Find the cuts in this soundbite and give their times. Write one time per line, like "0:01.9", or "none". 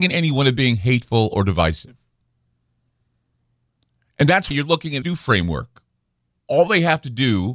0:04.5
0:05.0
0:06.4